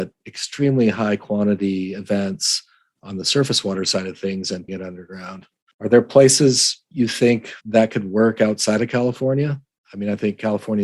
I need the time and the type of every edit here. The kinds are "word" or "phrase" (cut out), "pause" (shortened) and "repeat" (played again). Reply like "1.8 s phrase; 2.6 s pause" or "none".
4.7 s word; 7.6 s pause